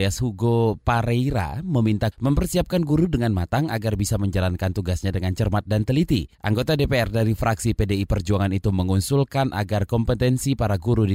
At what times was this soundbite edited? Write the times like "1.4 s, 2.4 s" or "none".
2.1 s, 6.3 s